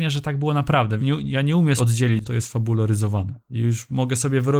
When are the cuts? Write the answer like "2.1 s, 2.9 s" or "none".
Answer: 1.0 s, 1.8 s, 2.2 s